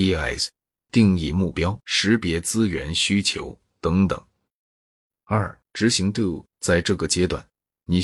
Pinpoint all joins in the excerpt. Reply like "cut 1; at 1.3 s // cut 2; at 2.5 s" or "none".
cut 1; at 1.8 s // cut 2; at 5.7 s